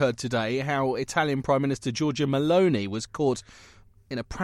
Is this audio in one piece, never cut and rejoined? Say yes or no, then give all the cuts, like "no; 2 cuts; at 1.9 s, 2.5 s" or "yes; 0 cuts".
yes; 0 cuts